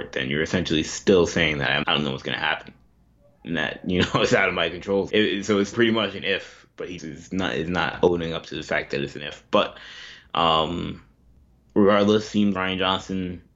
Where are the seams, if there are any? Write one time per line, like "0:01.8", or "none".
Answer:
0:01.8
0:05.1
0:05.7
0:07.0
0:12.5